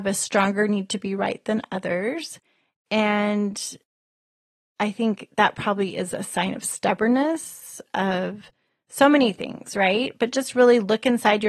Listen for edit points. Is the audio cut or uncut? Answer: uncut